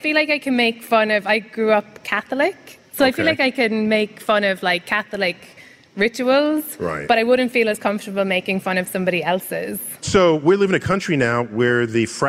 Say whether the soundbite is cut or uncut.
uncut